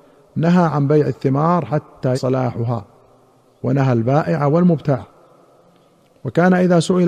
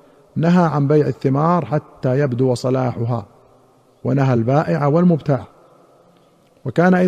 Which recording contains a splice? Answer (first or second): first